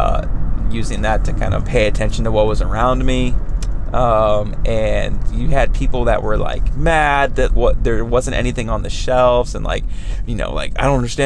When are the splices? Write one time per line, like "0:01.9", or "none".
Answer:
0:01.6
0:07.5